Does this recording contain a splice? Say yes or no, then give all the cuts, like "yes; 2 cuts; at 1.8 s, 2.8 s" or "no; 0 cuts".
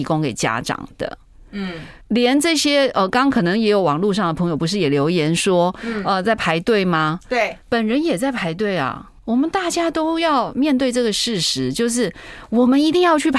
yes; 3 cuts; at 2.0 s, 7.6 s, 9.2 s